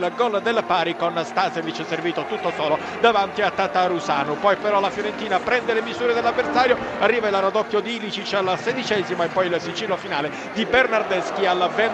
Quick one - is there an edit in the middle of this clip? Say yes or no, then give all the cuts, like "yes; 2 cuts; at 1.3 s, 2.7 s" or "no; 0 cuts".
no; 0 cuts